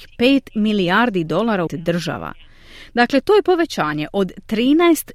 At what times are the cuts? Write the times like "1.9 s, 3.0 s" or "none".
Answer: 1.7 s

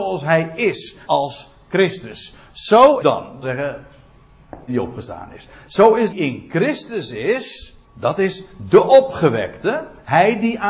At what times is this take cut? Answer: 1.1 s, 3.0 s, 3.4 s, 4.7 s, 6.1 s, 7.8 s

